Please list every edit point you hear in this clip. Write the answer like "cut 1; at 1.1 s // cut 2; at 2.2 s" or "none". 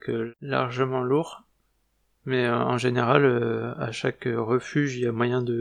none